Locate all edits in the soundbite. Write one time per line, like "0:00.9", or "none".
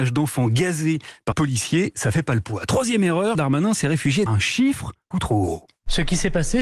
0:01.3
0:03.3
0:04.3
0:05.1